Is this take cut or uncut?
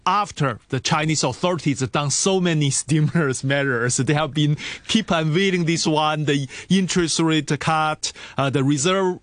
uncut